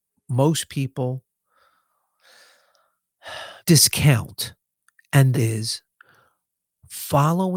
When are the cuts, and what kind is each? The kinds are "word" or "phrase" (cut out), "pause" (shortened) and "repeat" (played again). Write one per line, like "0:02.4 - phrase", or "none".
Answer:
0:03.6 - pause
0:05.3 - word